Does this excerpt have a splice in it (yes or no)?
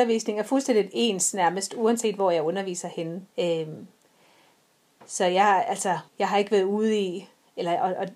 yes